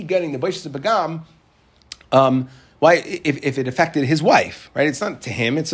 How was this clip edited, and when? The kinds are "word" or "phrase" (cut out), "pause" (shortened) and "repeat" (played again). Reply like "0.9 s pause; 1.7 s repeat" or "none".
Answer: none